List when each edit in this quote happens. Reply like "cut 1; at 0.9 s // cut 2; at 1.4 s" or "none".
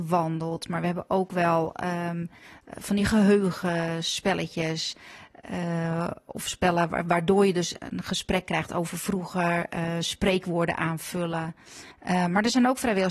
cut 1; at 11.9 s